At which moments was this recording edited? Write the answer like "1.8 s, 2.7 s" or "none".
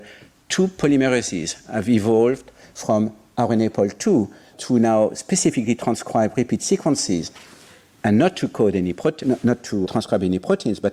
4.5 s, 9.2 s, 9.8 s